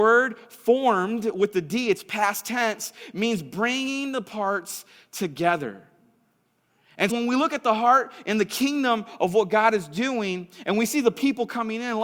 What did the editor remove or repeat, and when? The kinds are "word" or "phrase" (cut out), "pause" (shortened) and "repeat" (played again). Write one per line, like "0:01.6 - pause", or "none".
0:07.1 - word